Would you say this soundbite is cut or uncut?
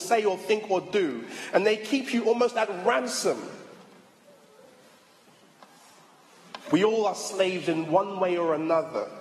cut